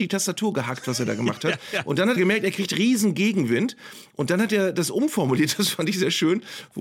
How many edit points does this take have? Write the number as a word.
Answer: one